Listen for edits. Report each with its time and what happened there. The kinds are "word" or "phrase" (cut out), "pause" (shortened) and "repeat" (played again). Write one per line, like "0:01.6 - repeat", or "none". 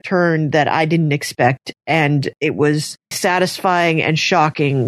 0:02.4 - pause
0:03.1 - word